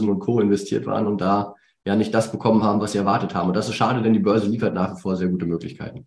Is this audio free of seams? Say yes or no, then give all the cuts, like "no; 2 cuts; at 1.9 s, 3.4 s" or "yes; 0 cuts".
yes; 0 cuts